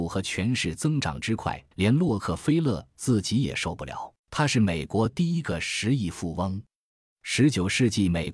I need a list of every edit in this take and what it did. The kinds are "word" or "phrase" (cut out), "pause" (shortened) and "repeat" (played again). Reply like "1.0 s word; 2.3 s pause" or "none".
1.7 s pause; 4.2 s pause